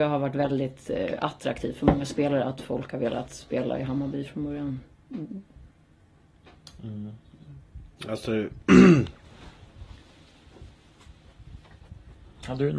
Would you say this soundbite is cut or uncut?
uncut